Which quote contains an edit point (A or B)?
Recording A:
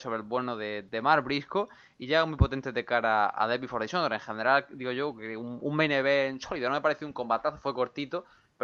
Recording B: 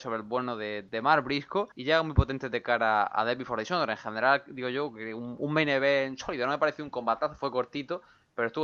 B